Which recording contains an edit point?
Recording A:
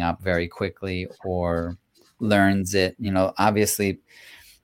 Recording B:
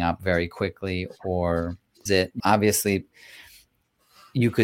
B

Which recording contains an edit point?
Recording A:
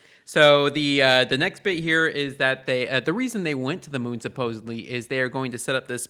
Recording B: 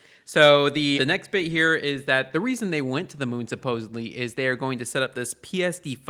B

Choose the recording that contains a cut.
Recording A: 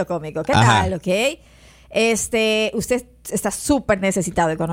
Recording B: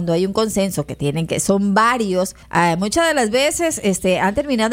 B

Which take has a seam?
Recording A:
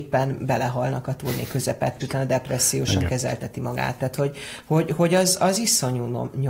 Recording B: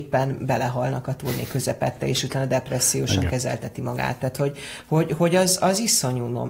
A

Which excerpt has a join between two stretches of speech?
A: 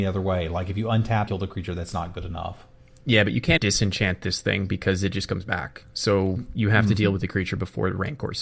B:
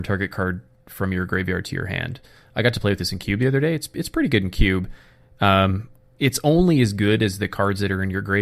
A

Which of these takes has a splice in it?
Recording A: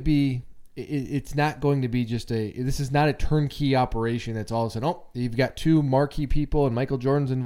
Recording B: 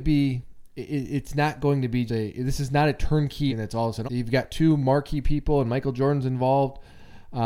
B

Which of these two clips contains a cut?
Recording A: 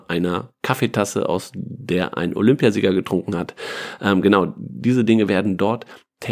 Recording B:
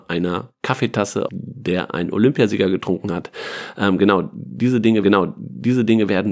B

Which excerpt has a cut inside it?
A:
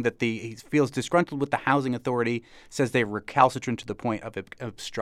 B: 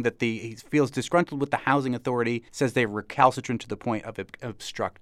B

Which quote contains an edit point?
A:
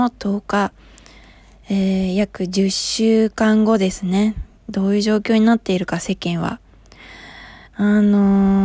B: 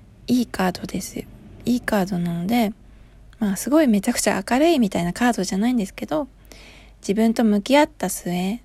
A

